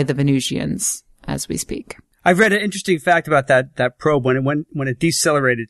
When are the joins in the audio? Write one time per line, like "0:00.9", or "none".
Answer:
none

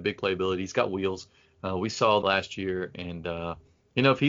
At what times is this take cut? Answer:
0:02.2

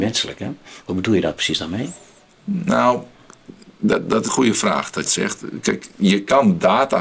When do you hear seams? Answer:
0:04.3
0:05.1

